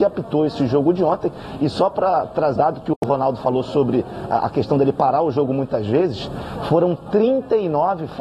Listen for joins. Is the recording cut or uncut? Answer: cut